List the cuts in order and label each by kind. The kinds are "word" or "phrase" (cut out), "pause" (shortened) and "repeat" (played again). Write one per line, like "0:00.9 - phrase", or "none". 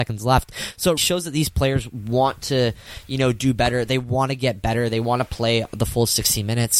0:01.0 - word